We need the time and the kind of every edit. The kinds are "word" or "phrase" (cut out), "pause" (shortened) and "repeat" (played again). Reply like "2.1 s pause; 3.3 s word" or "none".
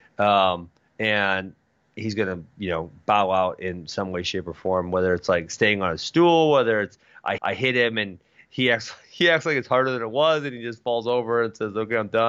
7.4 s repeat